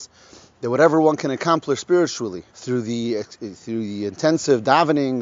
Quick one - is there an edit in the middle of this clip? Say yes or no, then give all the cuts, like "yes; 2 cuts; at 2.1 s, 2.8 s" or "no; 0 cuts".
yes; 1 cut; at 2.5 s